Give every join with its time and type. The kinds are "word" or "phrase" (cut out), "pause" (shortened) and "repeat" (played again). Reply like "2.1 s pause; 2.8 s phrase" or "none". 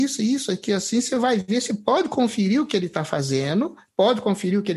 none